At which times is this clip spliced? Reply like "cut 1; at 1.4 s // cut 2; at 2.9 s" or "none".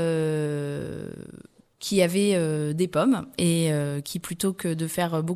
none